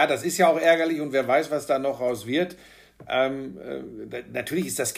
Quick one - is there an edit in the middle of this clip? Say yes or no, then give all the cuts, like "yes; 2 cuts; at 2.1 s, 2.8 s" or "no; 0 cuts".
no; 0 cuts